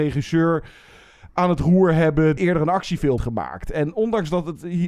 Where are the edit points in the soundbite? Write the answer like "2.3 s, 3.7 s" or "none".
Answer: 2.4 s, 3.2 s